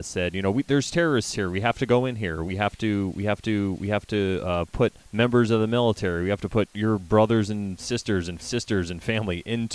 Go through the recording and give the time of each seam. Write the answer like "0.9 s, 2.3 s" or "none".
3.4 s, 5.0 s, 8.4 s